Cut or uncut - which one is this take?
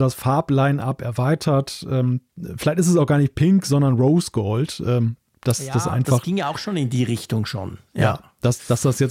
uncut